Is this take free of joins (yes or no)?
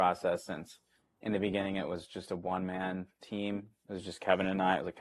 yes